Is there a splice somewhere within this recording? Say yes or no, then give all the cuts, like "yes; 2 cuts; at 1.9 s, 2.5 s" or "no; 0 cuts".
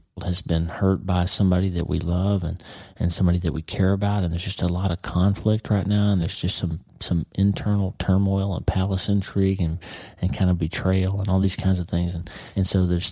no; 0 cuts